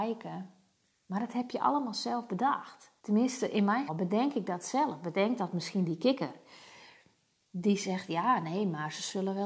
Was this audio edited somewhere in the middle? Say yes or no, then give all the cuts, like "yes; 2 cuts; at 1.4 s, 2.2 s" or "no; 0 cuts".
yes; 2 cuts; at 3.0 s, 3.9 s